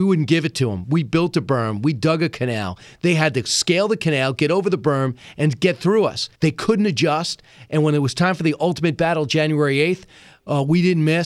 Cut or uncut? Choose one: cut